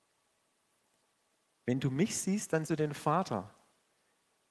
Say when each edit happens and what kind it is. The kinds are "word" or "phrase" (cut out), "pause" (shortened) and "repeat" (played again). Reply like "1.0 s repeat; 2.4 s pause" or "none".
2.6 s word